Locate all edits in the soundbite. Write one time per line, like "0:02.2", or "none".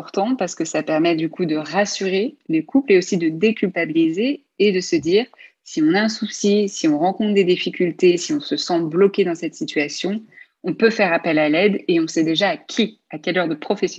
none